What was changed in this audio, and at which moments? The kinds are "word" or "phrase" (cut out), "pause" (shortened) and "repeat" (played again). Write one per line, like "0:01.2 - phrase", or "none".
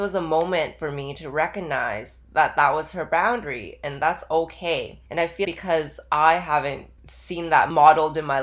0:05.1 - pause
0:05.4 - word
0:07.0 - pause